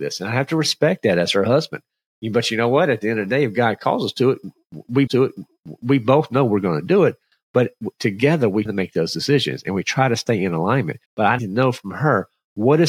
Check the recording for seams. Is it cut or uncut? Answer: cut